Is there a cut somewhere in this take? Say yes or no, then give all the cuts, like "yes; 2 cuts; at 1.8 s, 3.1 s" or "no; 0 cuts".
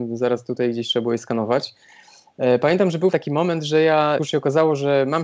yes; 2 cuts; at 3.1 s, 4.2 s